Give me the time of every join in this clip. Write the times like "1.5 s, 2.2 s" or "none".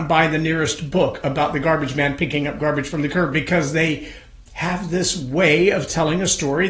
none